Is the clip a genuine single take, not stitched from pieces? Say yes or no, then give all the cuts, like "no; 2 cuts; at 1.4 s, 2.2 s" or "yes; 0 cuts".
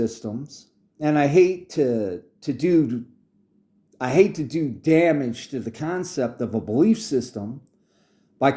yes; 0 cuts